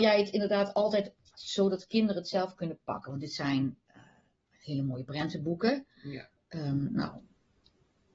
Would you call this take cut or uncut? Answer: uncut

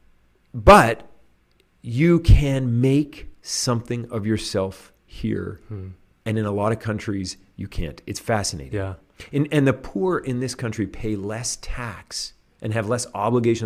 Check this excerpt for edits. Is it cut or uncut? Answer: uncut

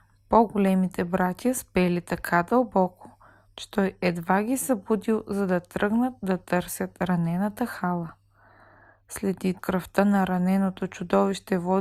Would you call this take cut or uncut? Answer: cut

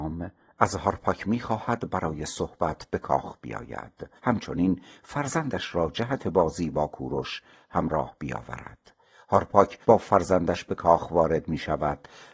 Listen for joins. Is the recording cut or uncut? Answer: cut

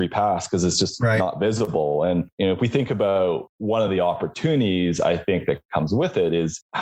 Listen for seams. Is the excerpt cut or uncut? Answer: uncut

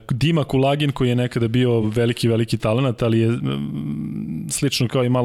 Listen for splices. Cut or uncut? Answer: uncut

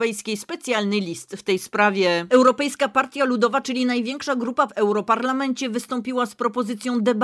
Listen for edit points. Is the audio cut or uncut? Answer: cut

